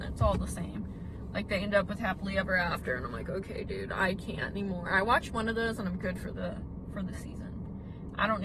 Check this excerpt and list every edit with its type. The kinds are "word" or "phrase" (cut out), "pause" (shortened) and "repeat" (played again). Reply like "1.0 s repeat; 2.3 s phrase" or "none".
none